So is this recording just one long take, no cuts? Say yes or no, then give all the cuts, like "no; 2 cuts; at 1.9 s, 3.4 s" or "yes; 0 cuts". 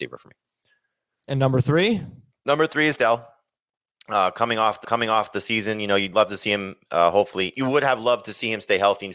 no; 3 cuts; at 3.0 s, 4.8 s, 7.5 s